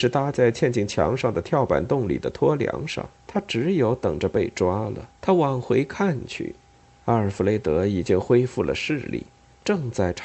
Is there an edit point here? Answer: yes; 2 cuts; at 3.1 s, 5.2 s

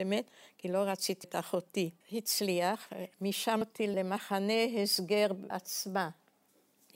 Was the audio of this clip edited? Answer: yes; 4 cuts; at 1.2 s, 2.0 s, 3.6 s, 5.5 s

